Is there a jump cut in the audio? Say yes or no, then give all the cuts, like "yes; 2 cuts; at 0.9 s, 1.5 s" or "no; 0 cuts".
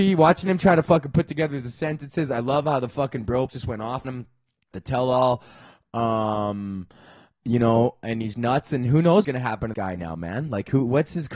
yes; 6 cuts; at 3.5 s, 4.0 s, 4.7 s, 8.3 s, 9.2 s, 9.7 s